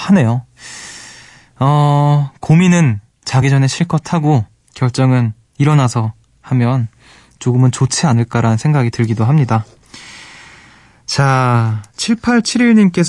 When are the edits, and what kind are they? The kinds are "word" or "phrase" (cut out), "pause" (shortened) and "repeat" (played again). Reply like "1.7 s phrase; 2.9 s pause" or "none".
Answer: none